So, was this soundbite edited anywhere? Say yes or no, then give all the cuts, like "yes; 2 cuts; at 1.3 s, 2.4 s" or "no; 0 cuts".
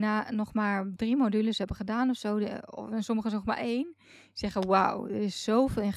no; 0 cuts